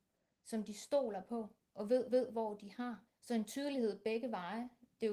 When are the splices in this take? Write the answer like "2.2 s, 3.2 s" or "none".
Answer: 2.1 s, 3.1 s